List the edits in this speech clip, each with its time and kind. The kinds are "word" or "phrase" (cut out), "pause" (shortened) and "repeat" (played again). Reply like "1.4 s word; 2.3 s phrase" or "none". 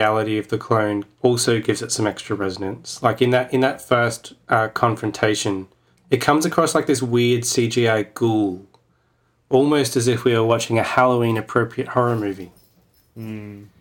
none